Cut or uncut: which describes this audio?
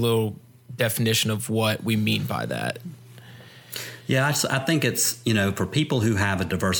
uncut